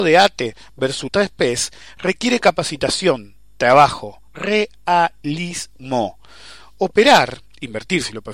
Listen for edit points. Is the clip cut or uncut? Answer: cut